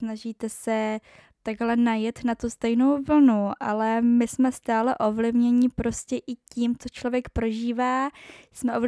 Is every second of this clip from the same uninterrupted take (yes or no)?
yes